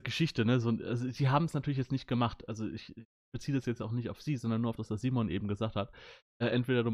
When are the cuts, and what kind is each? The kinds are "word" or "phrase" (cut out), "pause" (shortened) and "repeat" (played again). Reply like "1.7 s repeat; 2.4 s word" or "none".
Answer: 4.8 s word

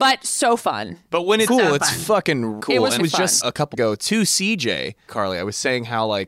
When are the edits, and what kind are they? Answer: 1.5 s word; 2.6 s word; 3.0 s word; 3.4 s word; 3.7 s word; 5.1 s word

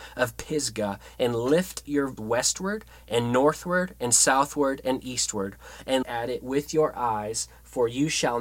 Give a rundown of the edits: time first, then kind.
1.8 s word; 2.2 s word; 6.0 s word

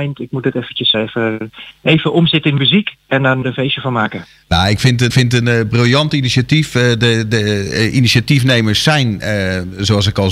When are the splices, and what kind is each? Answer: 0.9 s word; 1.8 s pause; 3.4 s phrase; 5.1 s repeat

